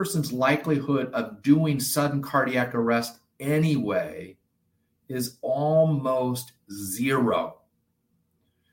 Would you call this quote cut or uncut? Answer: uncut